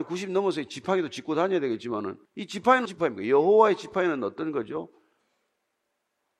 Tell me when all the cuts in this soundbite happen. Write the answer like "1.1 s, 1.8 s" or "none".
2.3 s, 2.9 s